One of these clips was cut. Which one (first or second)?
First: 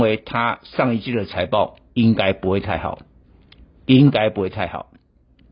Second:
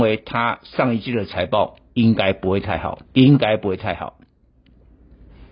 second